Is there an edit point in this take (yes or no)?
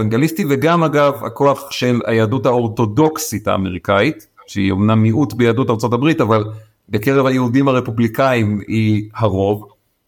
no